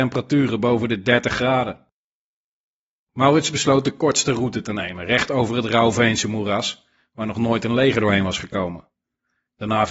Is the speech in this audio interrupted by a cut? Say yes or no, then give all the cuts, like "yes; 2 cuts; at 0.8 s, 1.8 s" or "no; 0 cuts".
no; 0 cuts